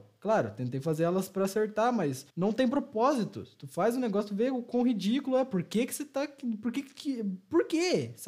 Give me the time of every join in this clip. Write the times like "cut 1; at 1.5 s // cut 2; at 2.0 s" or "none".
cut 1; at 2.3 s